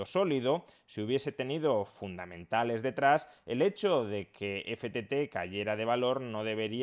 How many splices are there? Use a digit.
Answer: 0